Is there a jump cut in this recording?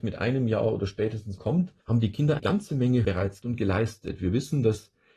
yes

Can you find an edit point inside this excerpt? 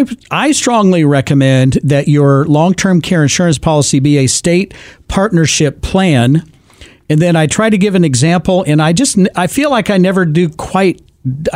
no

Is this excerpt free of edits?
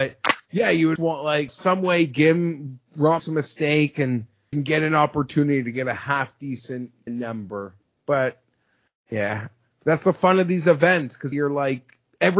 no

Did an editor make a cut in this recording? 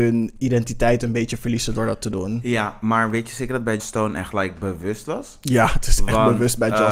yes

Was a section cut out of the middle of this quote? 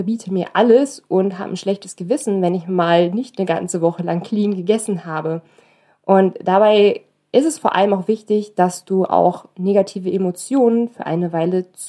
no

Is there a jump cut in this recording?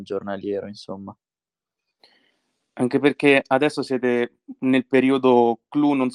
no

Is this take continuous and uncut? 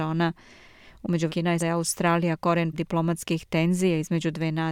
no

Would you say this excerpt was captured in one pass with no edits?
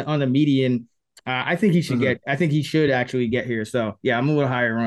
yes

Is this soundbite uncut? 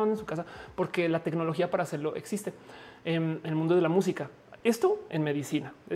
yes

